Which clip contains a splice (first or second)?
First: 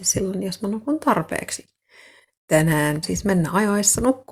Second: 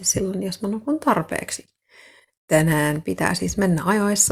first